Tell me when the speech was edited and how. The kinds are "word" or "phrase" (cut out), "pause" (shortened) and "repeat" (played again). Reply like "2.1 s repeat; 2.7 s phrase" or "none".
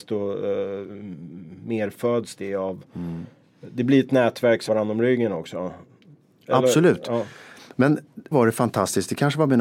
4.7 s word; 8.3 s word

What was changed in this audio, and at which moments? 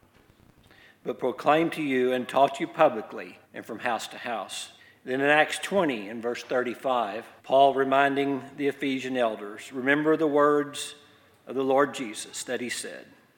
3.4 s pause; 4.8 s pause; 7.4 s pause

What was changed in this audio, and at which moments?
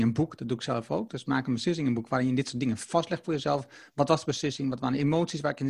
none

